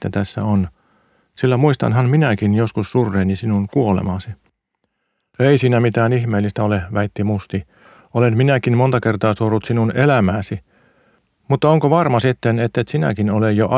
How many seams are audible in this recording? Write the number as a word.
zero